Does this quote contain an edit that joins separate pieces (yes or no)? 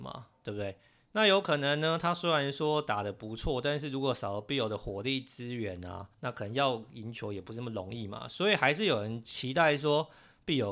yes